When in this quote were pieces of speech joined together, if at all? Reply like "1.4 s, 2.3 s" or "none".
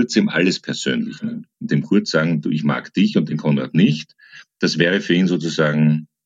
1.5 s